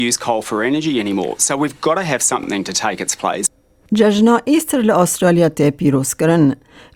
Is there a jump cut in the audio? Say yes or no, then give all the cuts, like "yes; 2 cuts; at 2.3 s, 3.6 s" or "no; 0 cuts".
no; 0 cuts